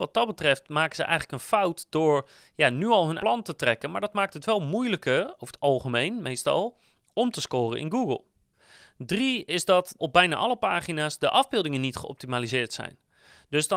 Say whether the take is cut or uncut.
cut